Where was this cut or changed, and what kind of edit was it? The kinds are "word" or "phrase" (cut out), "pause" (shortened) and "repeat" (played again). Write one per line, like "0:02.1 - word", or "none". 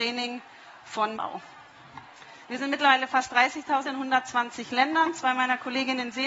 0:01.1 - phrase
0:02.4 - pause
0:03.8 - phrase